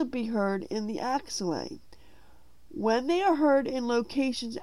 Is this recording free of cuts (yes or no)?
yes